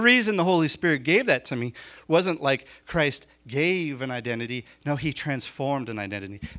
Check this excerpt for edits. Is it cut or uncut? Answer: uncut